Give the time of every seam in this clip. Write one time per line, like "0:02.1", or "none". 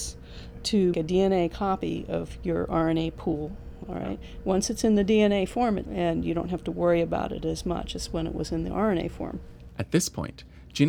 0:00.9
0:05.9